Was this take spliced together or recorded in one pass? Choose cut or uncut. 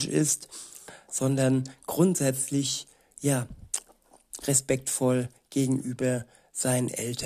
uncut